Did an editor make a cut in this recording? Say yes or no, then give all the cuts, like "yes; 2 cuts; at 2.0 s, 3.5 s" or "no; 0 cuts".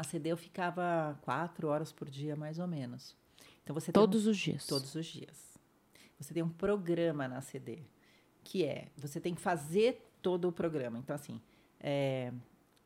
no; 0 cuts